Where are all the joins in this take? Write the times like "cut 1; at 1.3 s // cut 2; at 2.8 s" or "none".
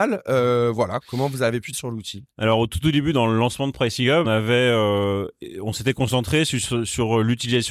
cut 1; at 1.0 s // cut 2; at 1.7 s // cut 3; at 4.2 s